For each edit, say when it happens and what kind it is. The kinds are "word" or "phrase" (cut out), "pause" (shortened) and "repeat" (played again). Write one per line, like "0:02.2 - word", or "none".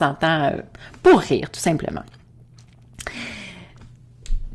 none